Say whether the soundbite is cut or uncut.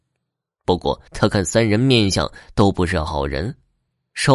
cut